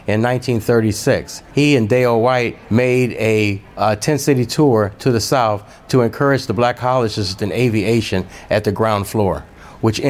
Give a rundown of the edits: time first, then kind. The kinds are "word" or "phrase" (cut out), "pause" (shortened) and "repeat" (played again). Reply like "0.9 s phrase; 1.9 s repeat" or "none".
1.5 s pause; 2.6 s pause; 3.7 s pause; 7.4 s phrase

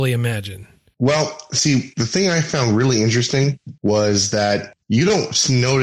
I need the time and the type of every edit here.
4.8 s pause

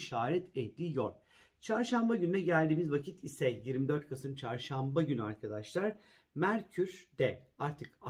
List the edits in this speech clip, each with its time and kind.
none

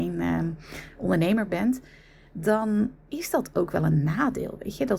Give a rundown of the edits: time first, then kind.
3.0 s pause

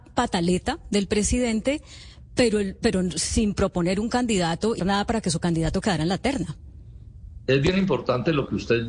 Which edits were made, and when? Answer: 4.8 s phrase

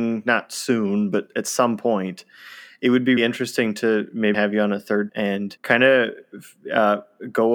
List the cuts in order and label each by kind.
3.2 s word; 4.3 s word; 5.1 s word; 5.6 s pause

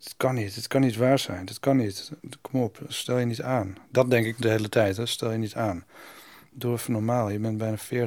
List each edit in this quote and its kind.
none

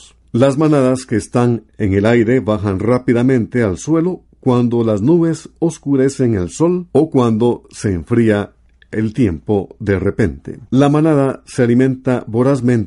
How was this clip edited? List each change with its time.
1.7 s pause; 6.9 s pause; 10.7 s pause

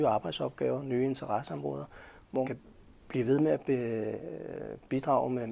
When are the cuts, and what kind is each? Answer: 2.4 s word

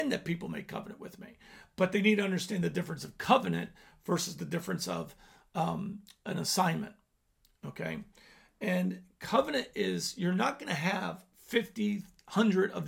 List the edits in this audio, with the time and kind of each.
none

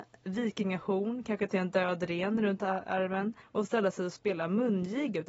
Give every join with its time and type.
1.5 s word; 3.4 s pause

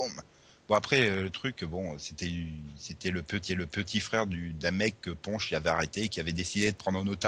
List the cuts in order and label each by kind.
3.5 s repeat

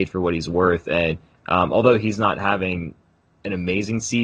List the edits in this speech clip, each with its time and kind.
none

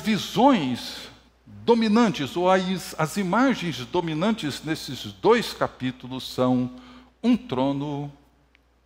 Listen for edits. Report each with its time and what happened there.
1.3 s pause

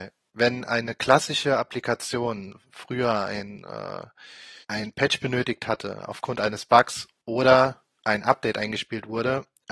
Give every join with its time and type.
4.6 s pause

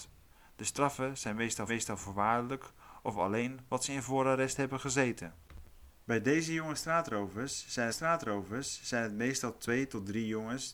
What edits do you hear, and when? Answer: 1.7 s repeat; 7.9 s repeat

